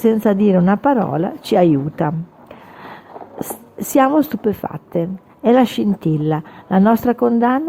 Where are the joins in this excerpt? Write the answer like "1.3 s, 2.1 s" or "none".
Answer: none